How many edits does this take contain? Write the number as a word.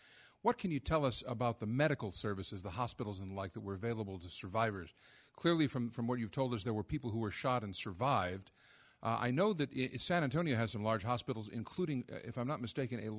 zero